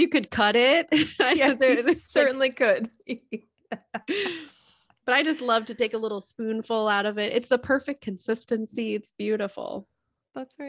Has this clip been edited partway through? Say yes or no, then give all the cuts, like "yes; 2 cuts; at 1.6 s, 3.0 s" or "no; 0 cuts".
no; 0 cuts